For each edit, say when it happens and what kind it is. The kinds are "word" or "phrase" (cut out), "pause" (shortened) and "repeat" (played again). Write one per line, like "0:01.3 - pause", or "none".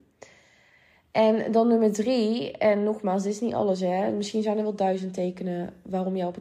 none

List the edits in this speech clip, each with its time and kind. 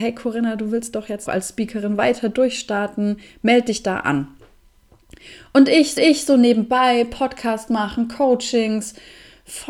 0:01.3 - word
0:06.0 - repeat

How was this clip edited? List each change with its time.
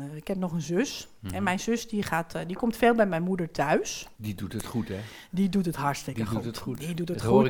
0:04.1 - pause

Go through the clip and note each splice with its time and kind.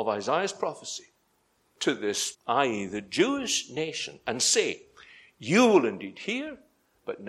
0:01.8 - word
0:02.3 - word

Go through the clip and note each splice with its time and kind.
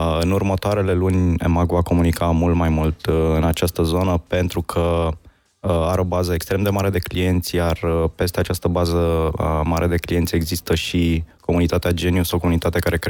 none

